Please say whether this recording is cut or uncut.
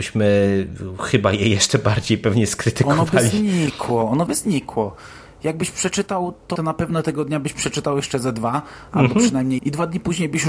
cut